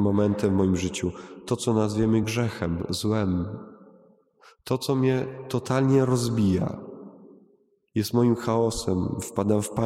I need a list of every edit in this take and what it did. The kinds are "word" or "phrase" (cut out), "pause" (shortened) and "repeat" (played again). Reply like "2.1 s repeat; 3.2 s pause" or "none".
none